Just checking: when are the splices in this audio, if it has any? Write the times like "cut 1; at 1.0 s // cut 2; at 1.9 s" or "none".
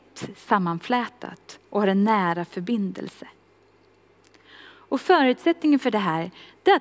none